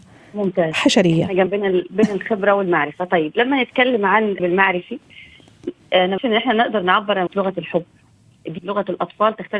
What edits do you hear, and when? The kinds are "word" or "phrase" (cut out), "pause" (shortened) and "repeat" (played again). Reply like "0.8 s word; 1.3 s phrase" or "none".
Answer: 1.5 s word; 4.4 s word; 6.2 s word; 7.3 s word; 8.6 s word